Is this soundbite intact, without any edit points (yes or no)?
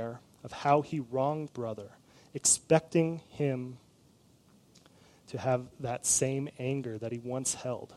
no